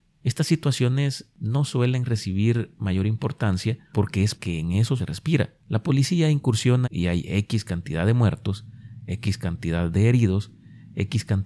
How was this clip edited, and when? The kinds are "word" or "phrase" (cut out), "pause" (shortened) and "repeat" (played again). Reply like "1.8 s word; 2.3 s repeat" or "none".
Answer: 3.8 s pause; 4.4 s phrase; 5.0 s word; 5.6 s pause; 6.8 s phrase